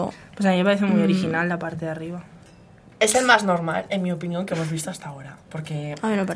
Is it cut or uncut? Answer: uncut